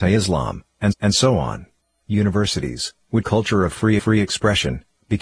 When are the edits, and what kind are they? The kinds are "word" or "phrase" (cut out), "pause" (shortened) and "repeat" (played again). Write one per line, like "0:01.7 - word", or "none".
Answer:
0:00.9 - repeat
0:01.8 - pause
0:03.2 - phrase
0:04.0 - repeat